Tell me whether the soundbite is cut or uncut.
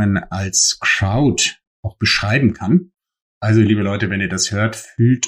uncut